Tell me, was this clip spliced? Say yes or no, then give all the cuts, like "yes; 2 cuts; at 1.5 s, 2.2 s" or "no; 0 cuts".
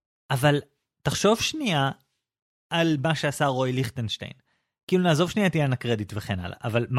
no; 0 cuts